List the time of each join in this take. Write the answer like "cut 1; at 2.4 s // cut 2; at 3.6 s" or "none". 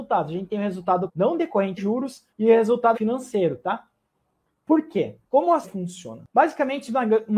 cut 1; at 1.1 s // cut 2; at 1.8 s // cut 3; at 2.3 s // cut 4; at 2.9 s // cut 5; at 5.2 s // cut 6; at 5.6 s